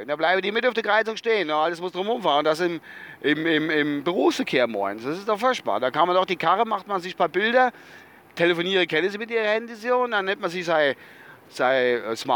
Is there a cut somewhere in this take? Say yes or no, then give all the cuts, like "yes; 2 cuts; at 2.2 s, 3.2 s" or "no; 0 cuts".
no; 0 cuts